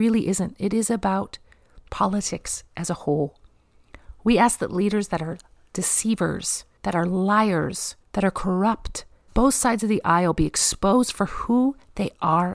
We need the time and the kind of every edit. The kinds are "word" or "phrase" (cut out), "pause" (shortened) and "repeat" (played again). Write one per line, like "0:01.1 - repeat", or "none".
0:06.8 - pause
0:08.0 - pause
0:09.3 - word